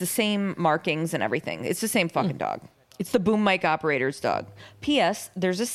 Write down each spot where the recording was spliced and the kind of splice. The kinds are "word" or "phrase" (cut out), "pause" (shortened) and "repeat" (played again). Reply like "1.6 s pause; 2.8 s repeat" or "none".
none

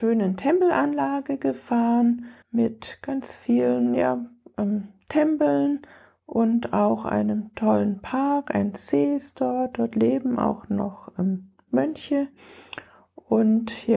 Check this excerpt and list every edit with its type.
2.4 s pause

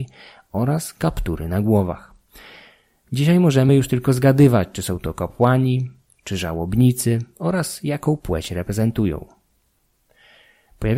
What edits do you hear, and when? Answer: none

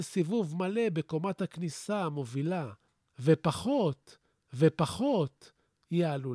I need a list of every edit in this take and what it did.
4.5 s repeat

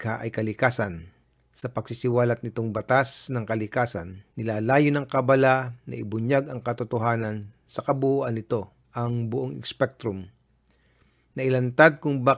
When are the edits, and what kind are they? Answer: 1.2 s pause; 4.3 s pause; 8.8 s pause

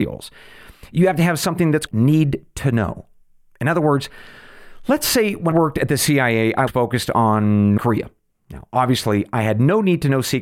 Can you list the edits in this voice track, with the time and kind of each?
1.9 s word; 5.5 s word; 6.7 s word; 7.8 s word

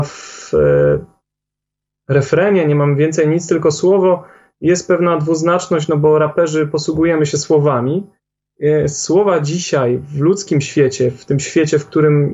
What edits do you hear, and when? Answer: none

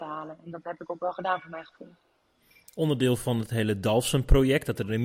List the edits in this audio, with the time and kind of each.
none

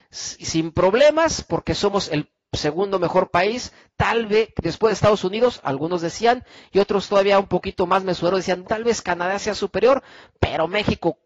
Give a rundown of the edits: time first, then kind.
8.6 s word

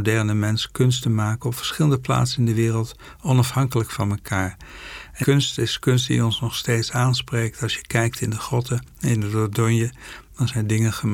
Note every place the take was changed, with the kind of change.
5.2 s word

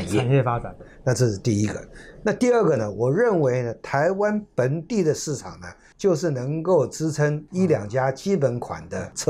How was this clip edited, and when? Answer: none

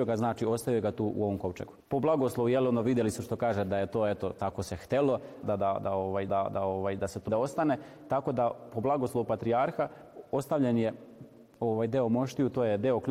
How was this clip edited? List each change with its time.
1.8 s pause; 5.4 s word; 6.3 s repeat; 7.3 s word

